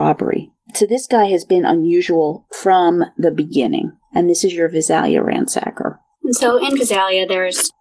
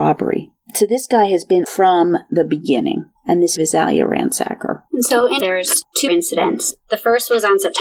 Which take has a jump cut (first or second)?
second